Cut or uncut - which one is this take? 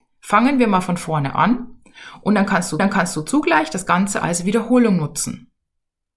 cut